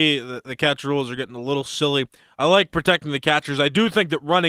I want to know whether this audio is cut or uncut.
uncut